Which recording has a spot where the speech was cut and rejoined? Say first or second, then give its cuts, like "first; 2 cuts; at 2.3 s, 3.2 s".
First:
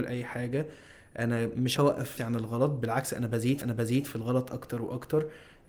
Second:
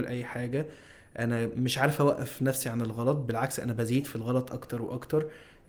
first; 3 cuts; at 1.8 s, 2.2 s, 3.6 s